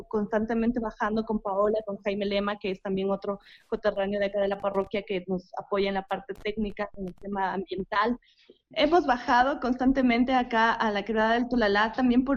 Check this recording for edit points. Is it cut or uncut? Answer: uncut